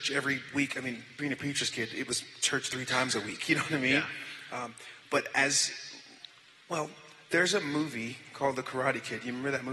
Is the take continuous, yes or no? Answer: yes